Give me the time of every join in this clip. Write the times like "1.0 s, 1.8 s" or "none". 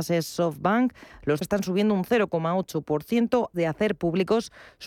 1.4 s, 3.5 s